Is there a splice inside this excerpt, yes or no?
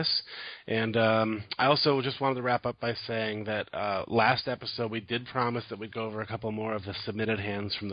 no